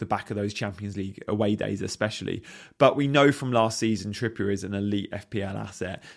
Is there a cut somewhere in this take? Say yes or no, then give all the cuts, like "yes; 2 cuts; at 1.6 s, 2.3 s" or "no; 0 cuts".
no; 0 cuts